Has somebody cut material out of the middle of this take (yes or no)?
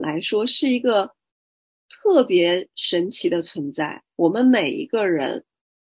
no